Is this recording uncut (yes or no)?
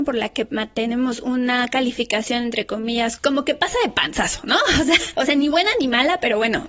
no